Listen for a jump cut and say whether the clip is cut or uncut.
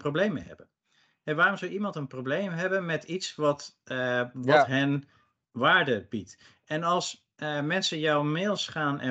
uncut